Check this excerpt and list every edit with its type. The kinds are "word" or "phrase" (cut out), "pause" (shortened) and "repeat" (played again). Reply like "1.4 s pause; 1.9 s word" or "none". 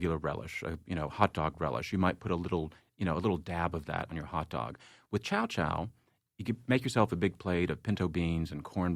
none